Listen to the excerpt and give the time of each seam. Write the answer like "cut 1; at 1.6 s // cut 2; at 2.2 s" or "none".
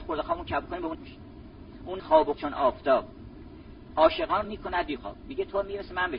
cut 1; at 0.9 s // cut 2; at 2.0 s // cut 3; at 2.3 s // cut 4; at 4.4 s // cut 5; at 5.0 s